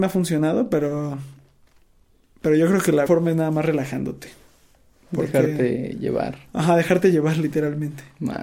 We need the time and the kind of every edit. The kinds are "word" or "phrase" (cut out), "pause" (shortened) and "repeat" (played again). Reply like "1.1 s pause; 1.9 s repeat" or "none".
3.1 s word